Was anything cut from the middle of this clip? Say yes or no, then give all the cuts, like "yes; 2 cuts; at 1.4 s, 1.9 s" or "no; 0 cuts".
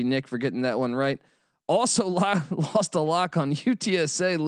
no; 0 cuts